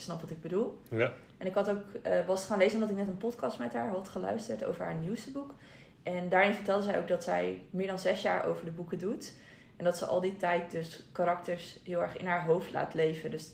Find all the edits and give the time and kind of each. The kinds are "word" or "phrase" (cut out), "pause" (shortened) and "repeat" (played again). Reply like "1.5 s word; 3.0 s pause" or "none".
none